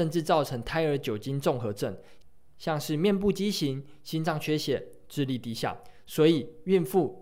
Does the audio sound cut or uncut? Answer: uncut